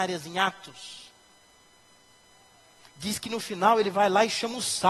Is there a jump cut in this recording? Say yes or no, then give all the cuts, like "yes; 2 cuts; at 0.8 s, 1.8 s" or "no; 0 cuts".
no; 0 cuts